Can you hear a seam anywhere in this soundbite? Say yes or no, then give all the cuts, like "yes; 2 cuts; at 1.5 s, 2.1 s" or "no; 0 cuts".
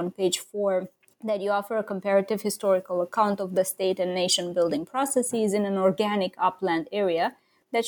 yes; 1 cut; at 1.0 s